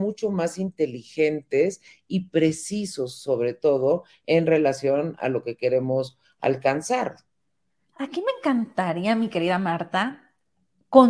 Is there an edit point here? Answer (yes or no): no